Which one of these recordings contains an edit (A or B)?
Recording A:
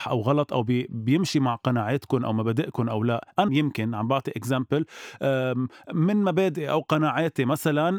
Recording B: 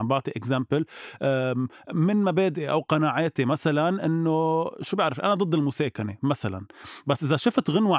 A